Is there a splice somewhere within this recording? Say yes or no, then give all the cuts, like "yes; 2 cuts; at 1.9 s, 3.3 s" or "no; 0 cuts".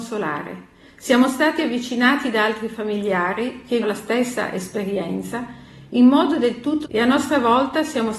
yes; 2 cuts; at 3.8 s, 6.8 s